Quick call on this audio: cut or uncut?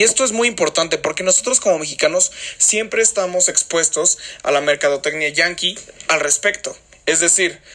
uncut